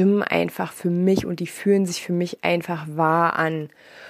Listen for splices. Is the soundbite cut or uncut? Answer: uncut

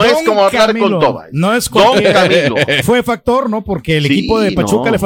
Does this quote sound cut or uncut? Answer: cut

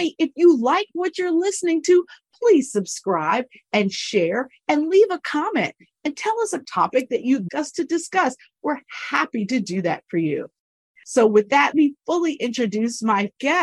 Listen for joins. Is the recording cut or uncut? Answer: cut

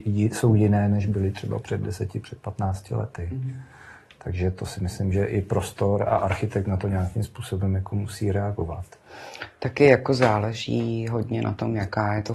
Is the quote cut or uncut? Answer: uncut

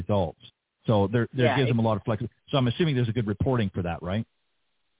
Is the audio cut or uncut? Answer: uncut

